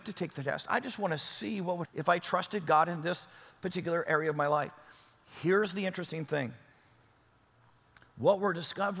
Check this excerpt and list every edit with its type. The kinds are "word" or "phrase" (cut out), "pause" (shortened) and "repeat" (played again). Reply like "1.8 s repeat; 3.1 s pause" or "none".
1.8 s word

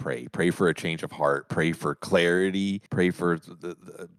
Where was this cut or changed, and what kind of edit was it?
2.9 s pause

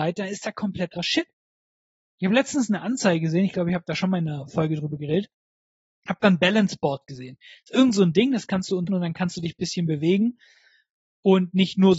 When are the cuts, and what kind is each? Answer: 1.0 s word; 8.9 s phrase

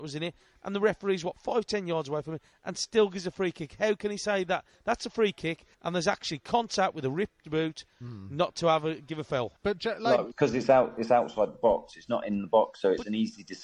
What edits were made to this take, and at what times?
5.7 s pause; 9.6 s pause; 10.3 s word

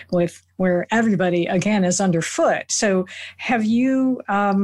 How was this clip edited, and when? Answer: none

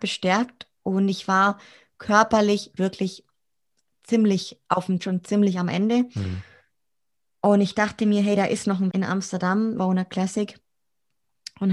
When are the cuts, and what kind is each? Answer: 2.8 s word; 5.0 s word; 8.9 s word; 9.8 s word

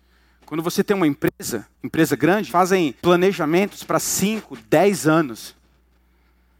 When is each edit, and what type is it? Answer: 1.7 s pause; 2.5 s word; 3.0 s pause

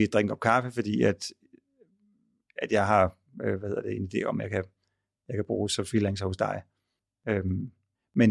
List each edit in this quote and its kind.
none

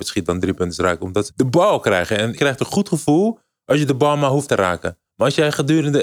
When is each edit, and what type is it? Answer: 1.3 s word; 2.4 s word; 4.5 s word

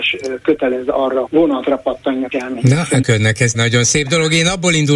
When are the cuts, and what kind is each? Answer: 1.3 s word; 2.3 s word; 3.0 s word; 3.5 s word

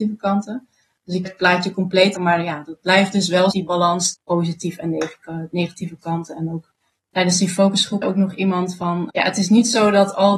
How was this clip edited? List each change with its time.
1.2 s word; 2.1 s word; 3.5 s word; 4.1 s word; 8.0 s word; 9.1 s word

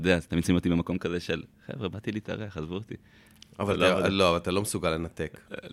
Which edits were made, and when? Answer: 1.5 s pause

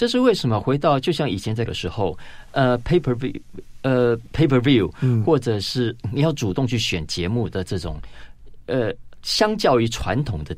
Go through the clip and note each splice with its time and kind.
1.7 s word

